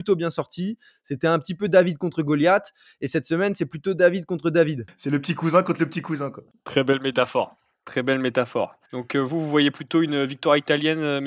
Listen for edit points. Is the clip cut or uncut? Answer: cut